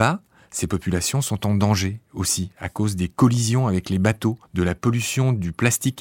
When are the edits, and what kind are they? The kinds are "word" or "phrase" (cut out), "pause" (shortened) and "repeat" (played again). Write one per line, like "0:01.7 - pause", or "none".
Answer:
0:04.4 - pause